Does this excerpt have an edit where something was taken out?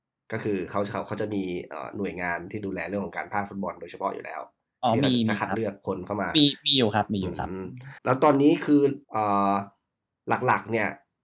yes; 2 cuts; at 8.0 s, 9.0 s

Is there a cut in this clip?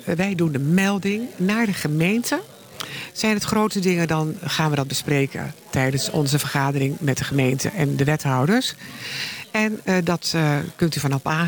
no; 0 cuts

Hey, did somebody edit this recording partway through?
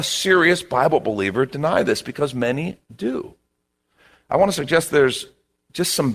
no; 0 cuts

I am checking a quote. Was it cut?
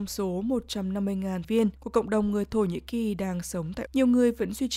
yes; 3 cuts; at 1.4 s, 1.8 s, 3.9 s

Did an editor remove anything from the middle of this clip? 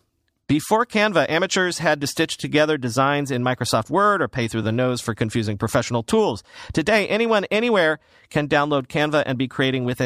no; 0 cuts

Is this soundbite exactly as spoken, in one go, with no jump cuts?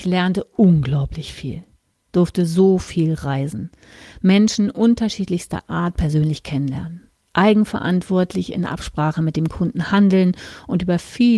yes; 0 cuts

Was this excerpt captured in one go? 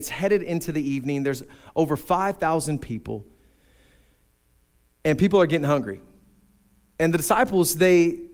yes; 0 cuts

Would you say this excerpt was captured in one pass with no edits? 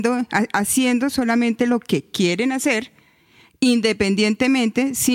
yes; 0 cuts

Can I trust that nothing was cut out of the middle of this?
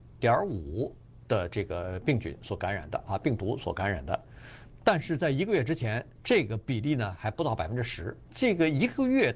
no; 2 cuts; at 6.1 s, 8.3 s

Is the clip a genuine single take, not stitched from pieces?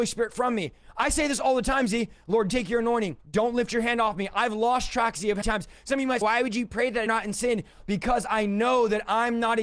no; 5 cuts; at 2.5 s, 3.2 s, 5.4 s, 6.2 s, 7.1 s

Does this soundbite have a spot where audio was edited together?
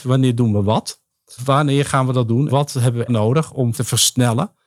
yes; 4 cuts; at 1.4 s, 2.5 s, 3.1 s, 3.7 s

